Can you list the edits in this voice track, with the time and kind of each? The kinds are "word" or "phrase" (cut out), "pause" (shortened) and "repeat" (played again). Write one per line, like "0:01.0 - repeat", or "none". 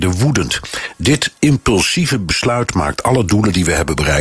none